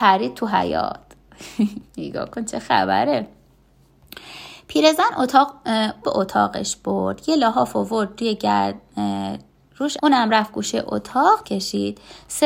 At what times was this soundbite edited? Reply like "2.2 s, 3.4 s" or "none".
1.9 s, 6.0 s, 10.0 s, 11.4 s